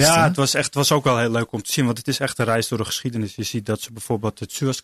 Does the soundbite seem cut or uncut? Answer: uncut